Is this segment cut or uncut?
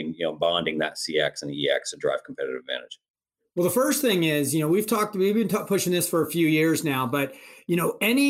uncut